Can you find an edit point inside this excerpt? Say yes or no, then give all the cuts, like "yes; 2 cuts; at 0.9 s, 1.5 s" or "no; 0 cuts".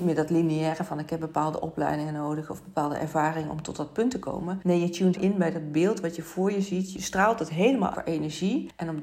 yes; 2 cuts; at 5.1 s, 7.9 s